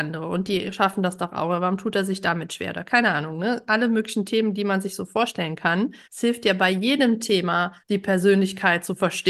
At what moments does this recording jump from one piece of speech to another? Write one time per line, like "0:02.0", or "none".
0:06.0
0:07.8